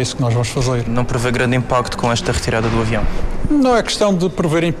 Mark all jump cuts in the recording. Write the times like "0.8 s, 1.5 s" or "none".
none